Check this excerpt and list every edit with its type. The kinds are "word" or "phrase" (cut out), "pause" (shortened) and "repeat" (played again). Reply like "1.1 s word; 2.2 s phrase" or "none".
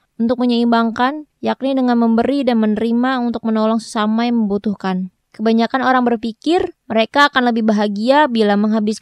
1.3 s pause; 5.2 s pause; 6.8 s pause